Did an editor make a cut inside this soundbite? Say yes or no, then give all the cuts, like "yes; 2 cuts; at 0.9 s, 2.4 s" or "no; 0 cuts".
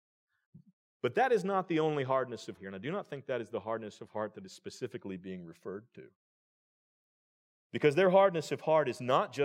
yes; 1 cut; at 2.6 s